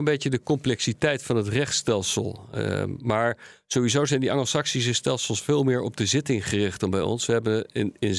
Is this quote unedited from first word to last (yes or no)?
yes